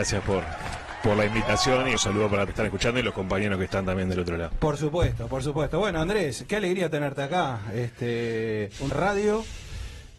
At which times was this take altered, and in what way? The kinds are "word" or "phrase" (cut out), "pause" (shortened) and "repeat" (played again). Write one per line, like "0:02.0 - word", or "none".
0:02.0 - phrase
0:02.5 - phrase
0:08.9 - word